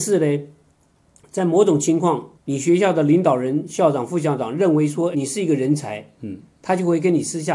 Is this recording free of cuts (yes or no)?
no